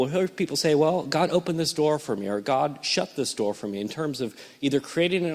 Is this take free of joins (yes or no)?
yes